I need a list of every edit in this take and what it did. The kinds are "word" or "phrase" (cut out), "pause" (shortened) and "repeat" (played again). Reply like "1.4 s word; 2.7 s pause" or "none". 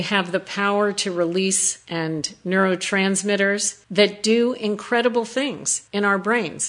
1.8 s word